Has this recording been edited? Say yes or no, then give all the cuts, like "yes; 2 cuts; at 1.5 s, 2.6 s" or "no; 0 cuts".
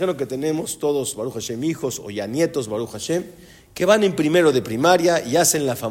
no; 0 cuts